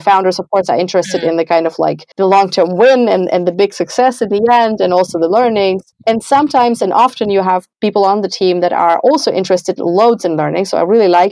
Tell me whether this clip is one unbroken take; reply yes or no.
no